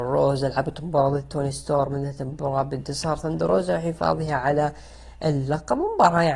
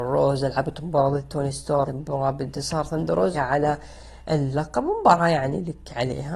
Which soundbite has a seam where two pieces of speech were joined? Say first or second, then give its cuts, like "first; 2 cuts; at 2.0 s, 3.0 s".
second; 2 cuts; at 1.9 s, 3.3 s